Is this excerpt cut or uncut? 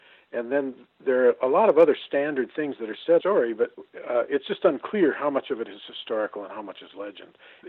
cut